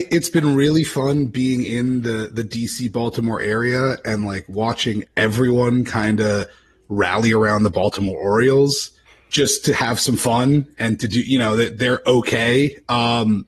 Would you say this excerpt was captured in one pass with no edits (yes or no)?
yes